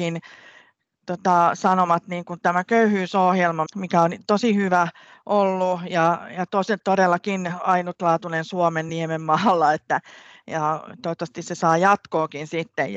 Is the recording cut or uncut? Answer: uncut